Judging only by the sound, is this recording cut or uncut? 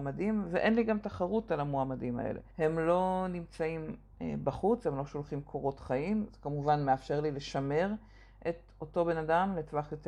cut